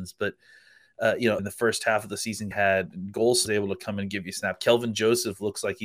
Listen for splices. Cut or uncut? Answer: cut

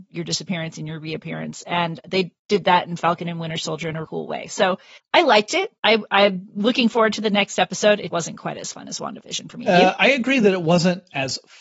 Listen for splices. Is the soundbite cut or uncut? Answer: cut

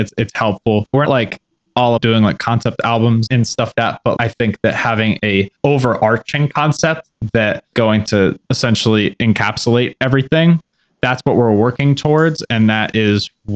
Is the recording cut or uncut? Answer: cut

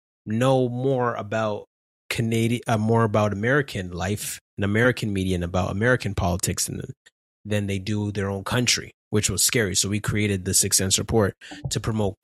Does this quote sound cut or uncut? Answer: uncut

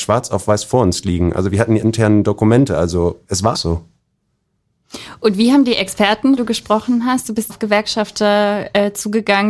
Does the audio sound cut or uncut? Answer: cut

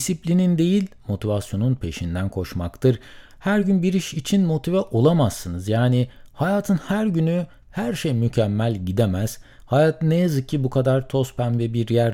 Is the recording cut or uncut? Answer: uncut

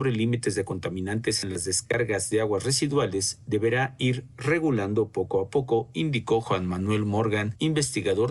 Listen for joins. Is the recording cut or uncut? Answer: uncut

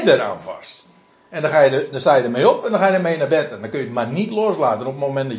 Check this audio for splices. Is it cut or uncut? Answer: uncut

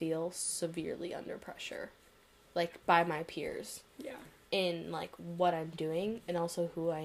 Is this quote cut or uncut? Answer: uncut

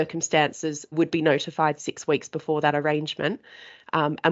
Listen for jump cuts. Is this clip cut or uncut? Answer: cut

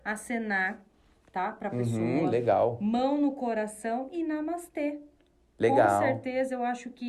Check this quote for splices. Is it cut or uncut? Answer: uncut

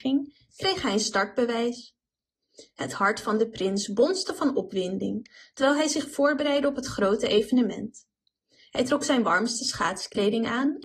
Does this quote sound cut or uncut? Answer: uncut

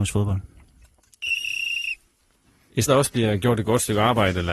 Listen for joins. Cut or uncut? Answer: cut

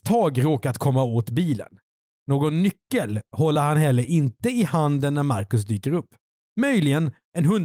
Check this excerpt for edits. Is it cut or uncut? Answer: uncut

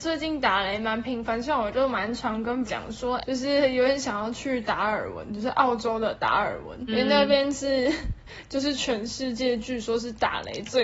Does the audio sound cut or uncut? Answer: cut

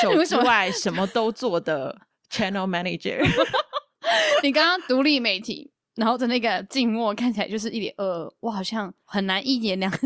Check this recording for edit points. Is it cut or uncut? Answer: cut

